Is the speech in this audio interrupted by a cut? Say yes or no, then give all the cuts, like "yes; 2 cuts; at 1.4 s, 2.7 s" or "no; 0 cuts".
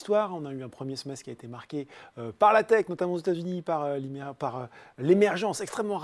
no; 0 cuts